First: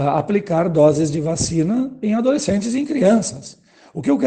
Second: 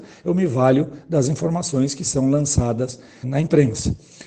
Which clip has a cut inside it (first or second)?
second